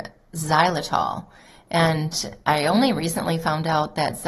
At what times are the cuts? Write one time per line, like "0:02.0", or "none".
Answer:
none